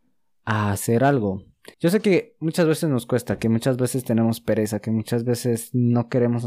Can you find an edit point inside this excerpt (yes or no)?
yes